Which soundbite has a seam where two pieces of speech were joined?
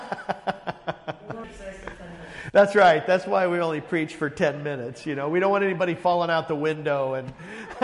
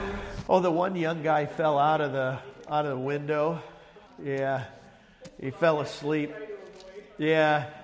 second; 1 cut; at 4.1 s

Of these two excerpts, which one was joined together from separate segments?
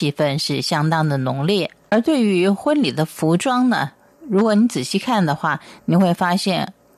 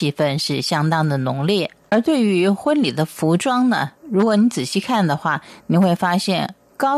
second; 1 cut; at 4.0 s

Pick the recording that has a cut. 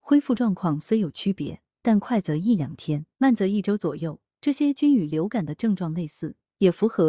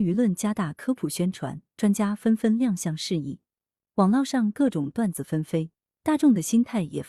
first; 1 cut; at 3.1 s

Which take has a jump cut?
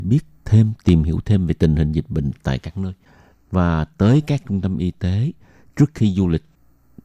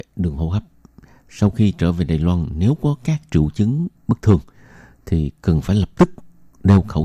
second; 1 cut; at 4.0 s

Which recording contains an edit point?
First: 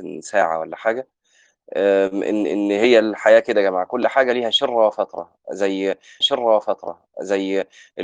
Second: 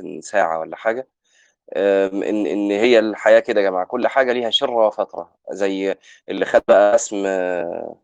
first; 1 cut; at 6.2 s

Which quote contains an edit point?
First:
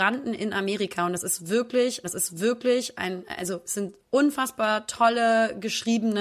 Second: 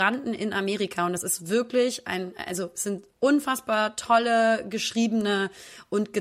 first; 1 cut; at 2.0 s

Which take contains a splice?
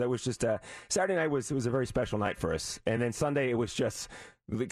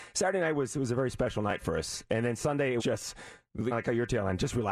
second; 2 cuts; at 2.8 s, 3.7 s

